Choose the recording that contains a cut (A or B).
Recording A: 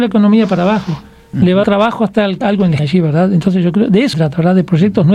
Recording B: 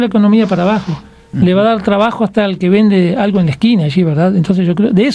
A